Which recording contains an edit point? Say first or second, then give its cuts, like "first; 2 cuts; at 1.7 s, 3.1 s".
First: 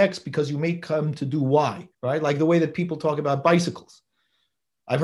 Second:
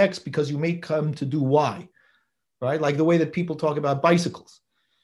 first; 1 cut; at 1.9 s